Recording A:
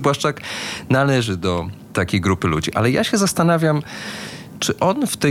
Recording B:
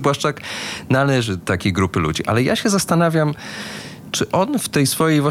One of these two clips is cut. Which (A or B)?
B